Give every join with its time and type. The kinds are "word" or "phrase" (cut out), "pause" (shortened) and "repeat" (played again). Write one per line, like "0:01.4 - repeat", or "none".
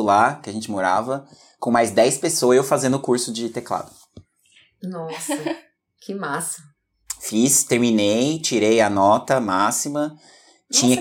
none